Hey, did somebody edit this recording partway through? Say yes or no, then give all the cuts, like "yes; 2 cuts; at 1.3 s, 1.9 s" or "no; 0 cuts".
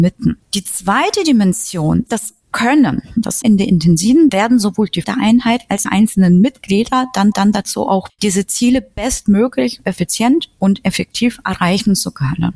yes; 7 cuts; at 2.1 s, 3.4 s, 4.3 s, 5.0 s, 5.9 s, 7.3 s, 8.1 s